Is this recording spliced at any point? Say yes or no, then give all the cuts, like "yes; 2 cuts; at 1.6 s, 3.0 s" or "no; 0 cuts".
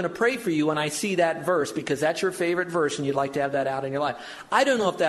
no; 0 cuts